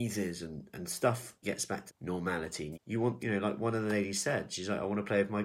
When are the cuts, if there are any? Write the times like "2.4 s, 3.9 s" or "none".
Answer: 1.4 s, 1.9 s, 2.7 s, 3.2 s